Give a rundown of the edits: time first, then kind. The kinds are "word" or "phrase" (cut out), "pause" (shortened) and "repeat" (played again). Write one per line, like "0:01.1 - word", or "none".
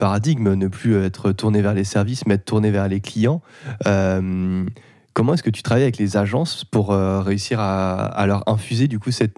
none